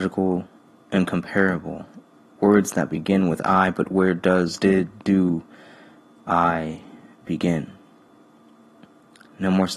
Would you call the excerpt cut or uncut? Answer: uncut